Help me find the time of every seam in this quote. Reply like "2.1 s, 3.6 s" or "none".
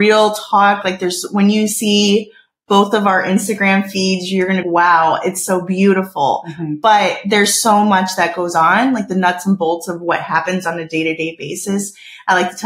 4.6 s

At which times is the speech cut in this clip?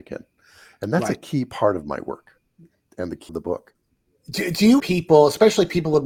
3.3 s, 4.8 s

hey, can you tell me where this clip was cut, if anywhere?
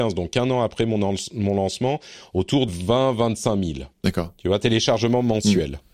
2.7 s, 3.9 s

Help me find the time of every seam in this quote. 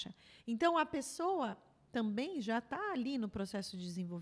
none

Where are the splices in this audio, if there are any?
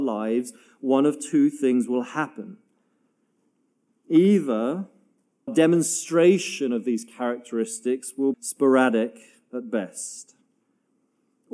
5.5 s, 8.3 s

